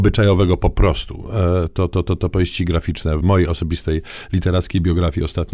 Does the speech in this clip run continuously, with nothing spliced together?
no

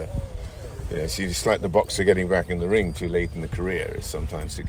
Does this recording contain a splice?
no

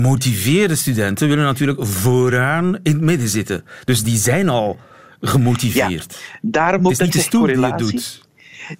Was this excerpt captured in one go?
yes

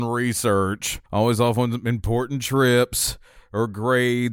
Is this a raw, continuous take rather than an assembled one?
no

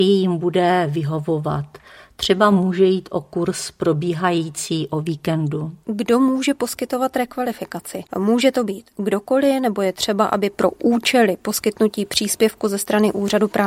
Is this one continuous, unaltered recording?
no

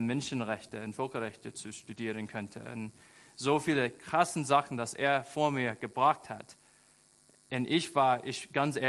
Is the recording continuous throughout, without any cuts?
yes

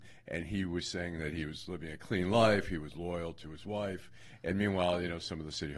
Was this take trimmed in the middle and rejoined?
no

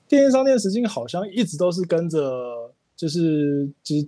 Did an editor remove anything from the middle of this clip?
yes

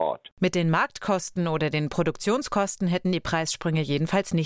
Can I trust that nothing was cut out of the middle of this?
yes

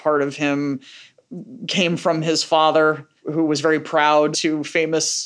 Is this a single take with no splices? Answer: no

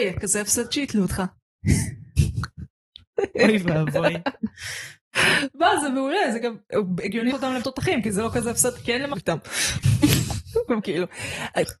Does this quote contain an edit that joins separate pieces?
yes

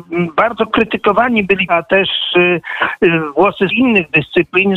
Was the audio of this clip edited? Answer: yes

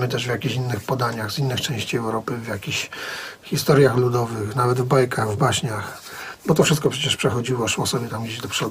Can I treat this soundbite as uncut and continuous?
yes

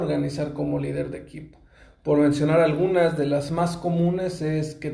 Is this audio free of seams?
yes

